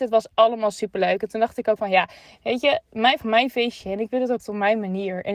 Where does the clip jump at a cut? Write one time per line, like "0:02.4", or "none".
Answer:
0:01.8
0:03.2
0:04.4